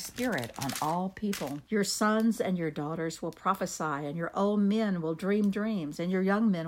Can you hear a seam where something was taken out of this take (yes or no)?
yes